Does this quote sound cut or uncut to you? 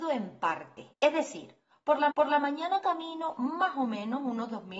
cut